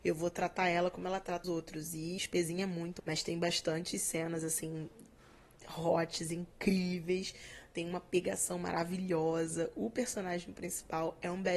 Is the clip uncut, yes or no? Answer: no